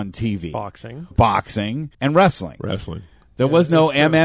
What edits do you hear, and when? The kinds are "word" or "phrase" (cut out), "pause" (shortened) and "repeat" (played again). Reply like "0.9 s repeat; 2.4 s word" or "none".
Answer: 1.1 s word; 1.9 s pause